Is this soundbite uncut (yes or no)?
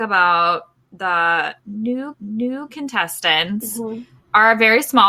no